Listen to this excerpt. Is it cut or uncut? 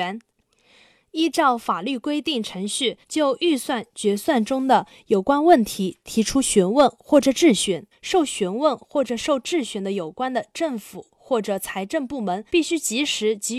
cut